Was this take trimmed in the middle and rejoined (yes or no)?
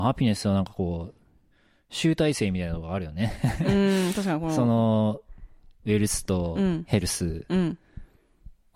no